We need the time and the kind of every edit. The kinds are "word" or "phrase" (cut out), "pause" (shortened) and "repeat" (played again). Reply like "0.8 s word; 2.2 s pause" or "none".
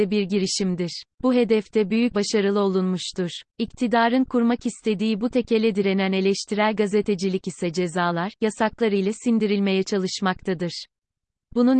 1.1 s pause; 2.1 s word; 3.5 s pause